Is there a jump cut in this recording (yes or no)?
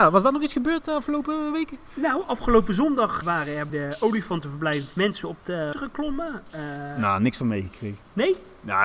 yes